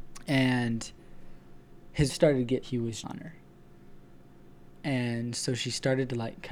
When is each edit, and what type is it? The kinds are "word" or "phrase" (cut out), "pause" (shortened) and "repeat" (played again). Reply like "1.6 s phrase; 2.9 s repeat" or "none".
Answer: 2.1 s word; 2.6 s phrase; 3.0 s word